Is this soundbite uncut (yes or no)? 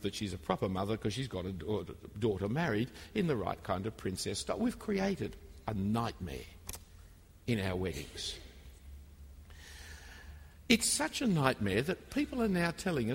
yes